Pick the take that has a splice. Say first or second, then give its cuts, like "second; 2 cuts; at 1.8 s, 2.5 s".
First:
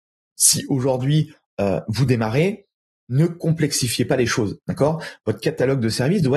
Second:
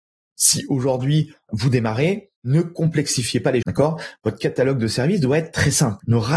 second; 3 cuts; at 1.5 s, 2.4 s, 3.6 s